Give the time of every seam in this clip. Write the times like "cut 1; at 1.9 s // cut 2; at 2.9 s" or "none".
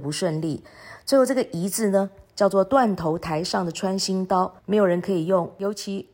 cut 1; at 4.6 s